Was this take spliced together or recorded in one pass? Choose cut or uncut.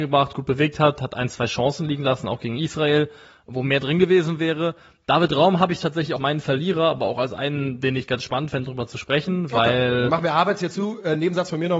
cut